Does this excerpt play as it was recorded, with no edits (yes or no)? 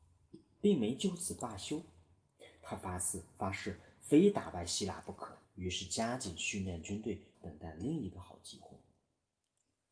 no